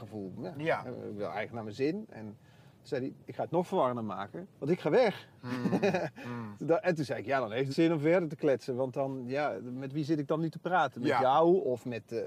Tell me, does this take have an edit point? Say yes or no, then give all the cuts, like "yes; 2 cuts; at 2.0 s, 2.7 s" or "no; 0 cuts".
yes; 2 cuts; at 4.5 s, 7.7 s